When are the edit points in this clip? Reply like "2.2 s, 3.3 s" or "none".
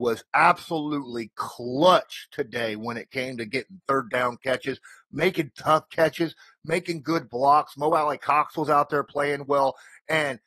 none